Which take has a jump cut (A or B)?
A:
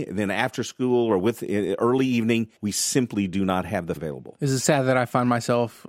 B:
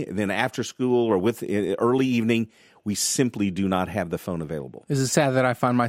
A